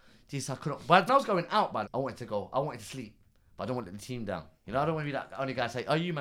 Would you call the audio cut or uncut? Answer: cut